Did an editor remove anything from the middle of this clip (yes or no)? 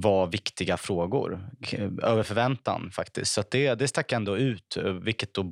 no